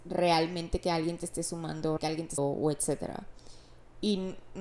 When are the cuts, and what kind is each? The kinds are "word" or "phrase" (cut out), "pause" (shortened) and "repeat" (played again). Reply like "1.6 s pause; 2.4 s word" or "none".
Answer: 2.0 s word; 2.4 s phrase